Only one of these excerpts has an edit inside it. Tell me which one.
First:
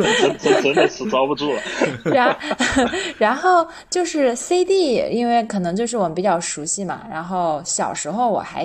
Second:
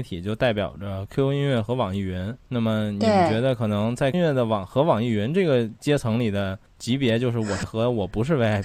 second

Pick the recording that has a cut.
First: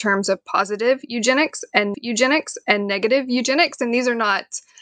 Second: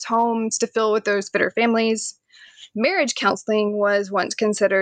first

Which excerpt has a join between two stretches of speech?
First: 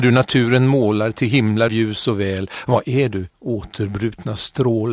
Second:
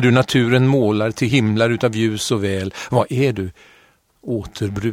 first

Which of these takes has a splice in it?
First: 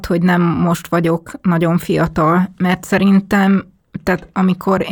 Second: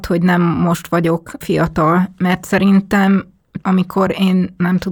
second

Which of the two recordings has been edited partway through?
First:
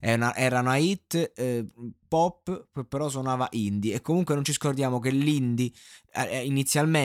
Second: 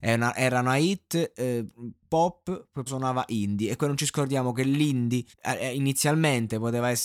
second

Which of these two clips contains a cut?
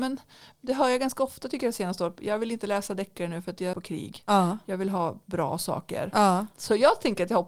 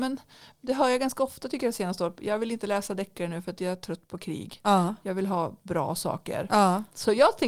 first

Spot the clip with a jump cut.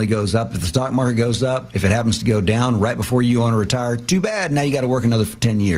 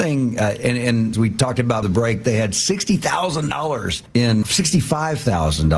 second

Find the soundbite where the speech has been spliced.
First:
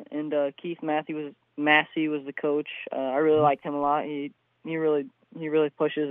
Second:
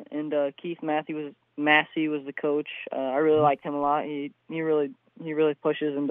second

